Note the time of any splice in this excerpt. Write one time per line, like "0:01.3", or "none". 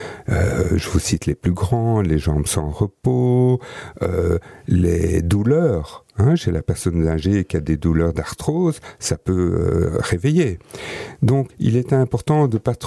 0:11.5